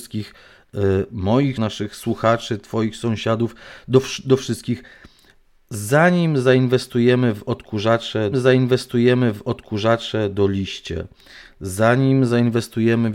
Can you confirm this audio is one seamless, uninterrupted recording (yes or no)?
no